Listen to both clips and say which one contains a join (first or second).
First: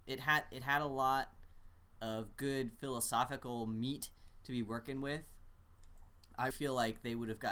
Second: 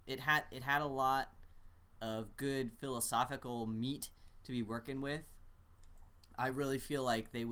first